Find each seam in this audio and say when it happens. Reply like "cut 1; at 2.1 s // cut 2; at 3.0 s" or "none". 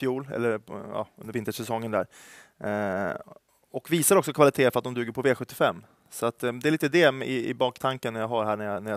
none

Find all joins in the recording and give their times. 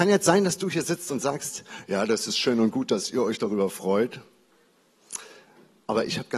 none

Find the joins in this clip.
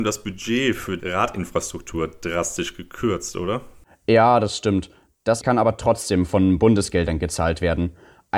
cut 1; at 1.0 s // cut 2; at 5.4 s

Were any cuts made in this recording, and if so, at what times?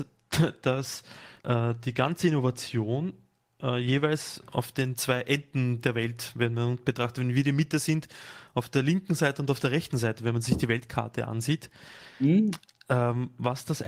cut 1; at 1.4 s

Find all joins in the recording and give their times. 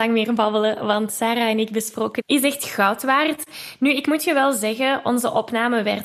cut 1; at 1.1 s // cut 2; at 2.2 s

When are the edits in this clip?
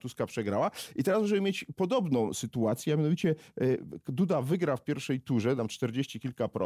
cut 1; at 5.6 s

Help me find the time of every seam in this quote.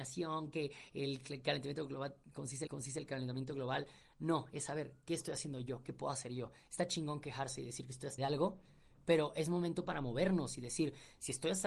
cut 1; at 2.7 s // cut 2; at 8.2 s

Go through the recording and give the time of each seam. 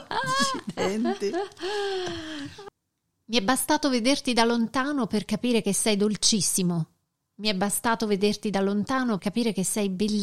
cut 1; at 9.2 s

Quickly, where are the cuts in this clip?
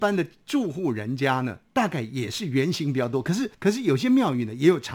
cut 1; at 1.7 s // cut 2; at 3.5 s

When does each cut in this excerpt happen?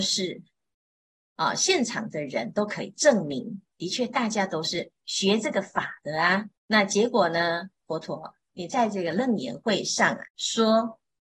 cut 1; at 6.6 s // cut 2; at 10.3 s

